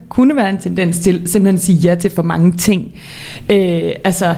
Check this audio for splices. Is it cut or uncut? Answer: uncut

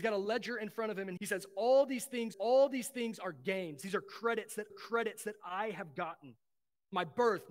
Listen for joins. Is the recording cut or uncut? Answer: cut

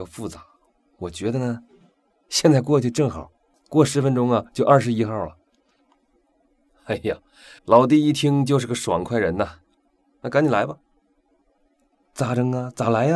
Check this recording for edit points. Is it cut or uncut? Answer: cut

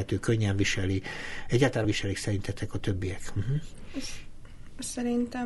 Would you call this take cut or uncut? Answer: cut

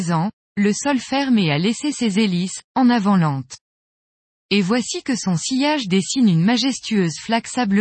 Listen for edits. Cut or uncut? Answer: uncut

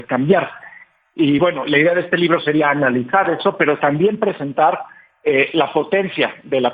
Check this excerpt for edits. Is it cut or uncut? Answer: uncut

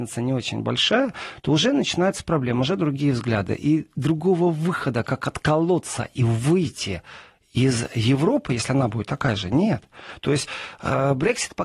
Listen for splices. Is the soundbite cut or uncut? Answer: uncut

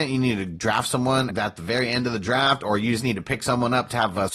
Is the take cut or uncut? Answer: cut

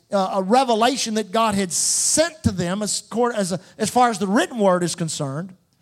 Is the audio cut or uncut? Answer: uncut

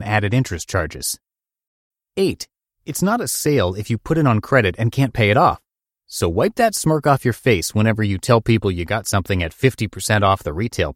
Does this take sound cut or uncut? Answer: uncut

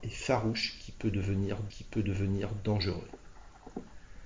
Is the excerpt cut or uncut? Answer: cut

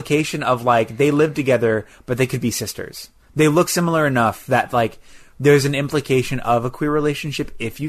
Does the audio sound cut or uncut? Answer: uncut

